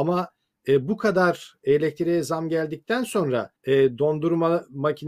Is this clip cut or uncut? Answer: cut